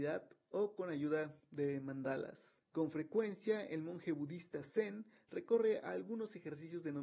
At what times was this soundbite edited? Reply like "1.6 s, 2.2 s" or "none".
2.6 s